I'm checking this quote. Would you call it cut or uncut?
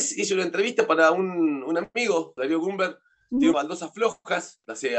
cut